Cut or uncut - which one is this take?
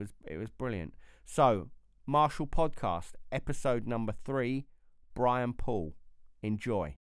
uncut